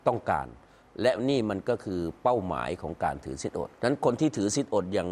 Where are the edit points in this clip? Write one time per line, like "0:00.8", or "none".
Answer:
0:03.7